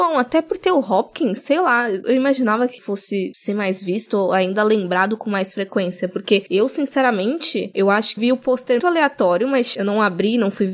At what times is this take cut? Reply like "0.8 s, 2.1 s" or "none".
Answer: 2.8 s, 8.2 s, 8.8 s